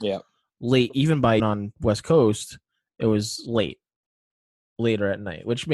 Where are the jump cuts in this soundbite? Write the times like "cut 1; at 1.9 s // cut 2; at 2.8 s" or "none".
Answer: cut 1; at 1.4 s